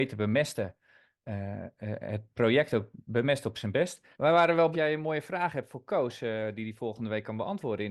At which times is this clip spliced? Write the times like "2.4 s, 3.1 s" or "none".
4.1 s, 4.7 s

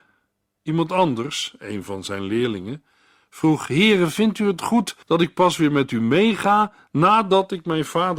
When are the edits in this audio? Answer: 5.0 s

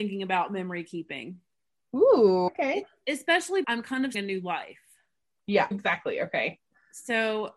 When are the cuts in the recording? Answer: 2.5 s, 3.6 s, 4.1 s, 5.7 s

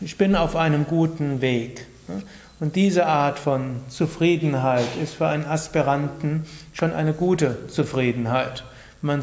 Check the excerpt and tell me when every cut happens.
none

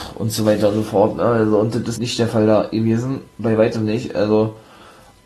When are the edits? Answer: 2.0 s

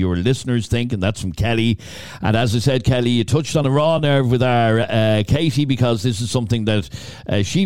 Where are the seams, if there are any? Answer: none

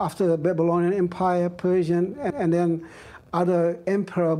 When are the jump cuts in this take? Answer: 2.3 s

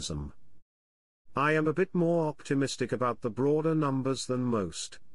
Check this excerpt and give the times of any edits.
none

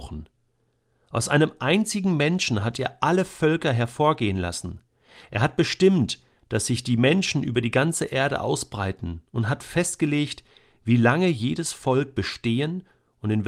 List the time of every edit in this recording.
none

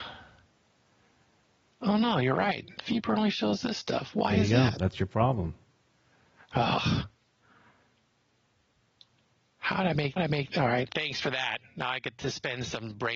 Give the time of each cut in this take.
10.2 s, 10.9 s

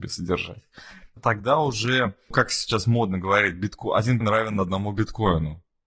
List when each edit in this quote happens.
1.2 s, 2.3 s, 4.2 s

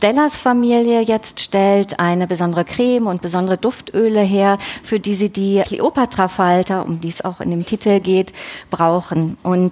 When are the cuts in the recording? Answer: none

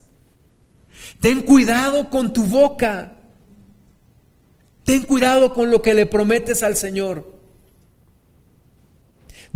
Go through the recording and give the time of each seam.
none

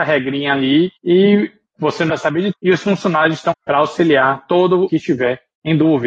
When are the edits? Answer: 1.0 s, 2.1 s, 2.5 s, 3.5 s, 4.9 s

